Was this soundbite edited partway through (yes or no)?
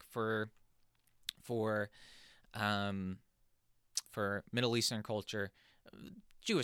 yes